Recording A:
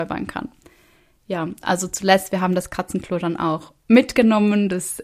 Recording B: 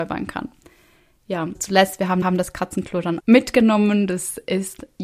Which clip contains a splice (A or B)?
B